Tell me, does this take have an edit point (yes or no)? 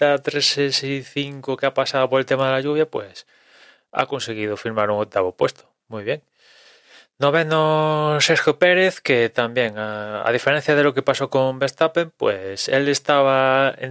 no